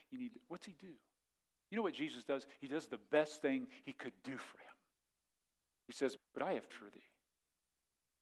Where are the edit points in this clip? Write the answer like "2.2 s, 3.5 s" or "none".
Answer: 6.2 s, 6.7 s